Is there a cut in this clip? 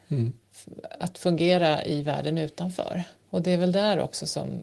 yes; 1 cut; at 3.2 s

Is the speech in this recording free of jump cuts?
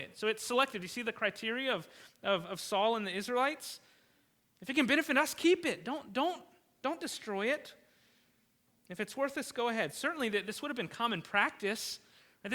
yes; 0 cuts

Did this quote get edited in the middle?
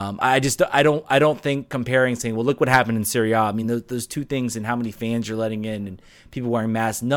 no; 0 cuts

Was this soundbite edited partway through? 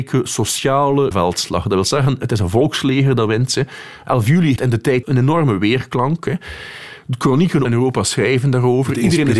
yes; 4 cuts; at 1.1 s, 4.6 s, 5.0 s, 7.6 s

